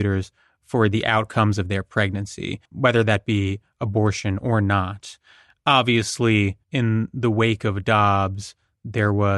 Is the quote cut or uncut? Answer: cut